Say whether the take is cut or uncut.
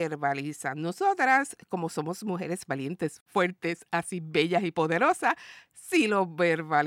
uncut